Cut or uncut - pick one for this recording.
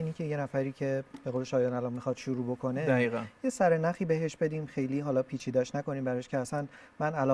uncut